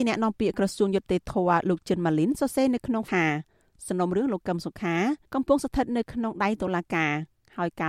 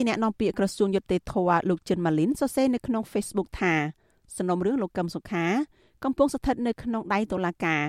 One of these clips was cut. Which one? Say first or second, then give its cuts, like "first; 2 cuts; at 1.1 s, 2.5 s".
first; 2 cuts; at 3.1 s, 5.2 s